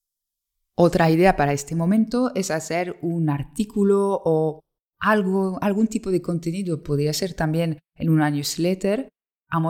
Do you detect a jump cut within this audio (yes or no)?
no